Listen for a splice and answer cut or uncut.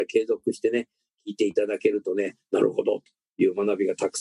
uncut